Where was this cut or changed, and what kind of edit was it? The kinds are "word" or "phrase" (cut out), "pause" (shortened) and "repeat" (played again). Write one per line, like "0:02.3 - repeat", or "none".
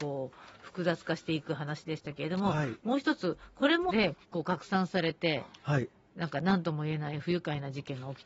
0:03.9 - word
0:04.2 - pause